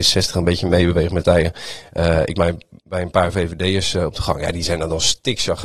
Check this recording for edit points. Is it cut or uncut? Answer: cut